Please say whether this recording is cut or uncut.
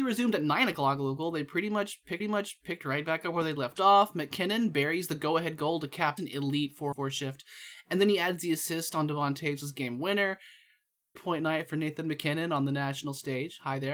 cut